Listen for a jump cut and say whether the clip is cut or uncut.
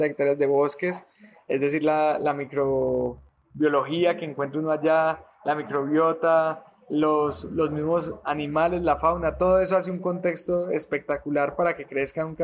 uncut